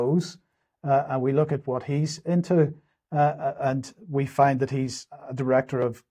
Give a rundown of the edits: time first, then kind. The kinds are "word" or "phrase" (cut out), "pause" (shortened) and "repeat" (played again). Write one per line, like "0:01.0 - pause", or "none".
none

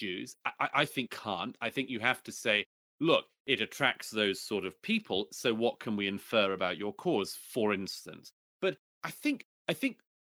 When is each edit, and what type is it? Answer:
0:01.1 - word

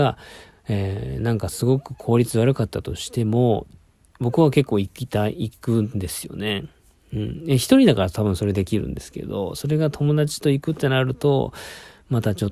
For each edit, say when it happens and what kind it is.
none

